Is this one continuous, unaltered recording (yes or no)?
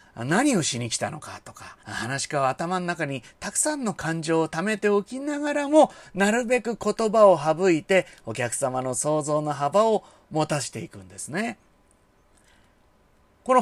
no